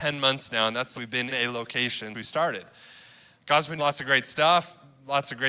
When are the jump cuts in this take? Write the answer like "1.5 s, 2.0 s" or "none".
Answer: 0.9 s, 1.3 s, 2.1 s, 3.8 s